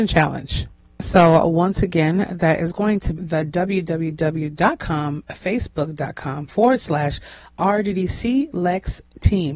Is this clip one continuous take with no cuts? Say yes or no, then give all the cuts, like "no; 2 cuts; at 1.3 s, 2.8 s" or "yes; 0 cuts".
no; 1 cut; at 3.2 s